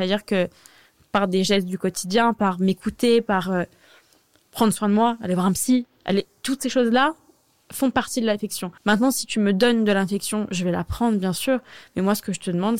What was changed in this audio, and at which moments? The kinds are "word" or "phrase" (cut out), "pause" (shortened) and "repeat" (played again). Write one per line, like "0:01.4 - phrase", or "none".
0:08.8 - pause